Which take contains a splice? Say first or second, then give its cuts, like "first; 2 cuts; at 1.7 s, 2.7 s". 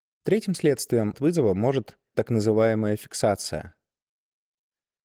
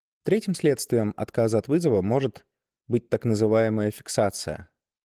first; 2 cuts; at 1.1 s, 2.1 s